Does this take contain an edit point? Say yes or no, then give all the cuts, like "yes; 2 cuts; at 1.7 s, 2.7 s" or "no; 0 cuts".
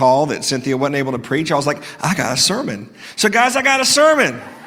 no; 0 cuts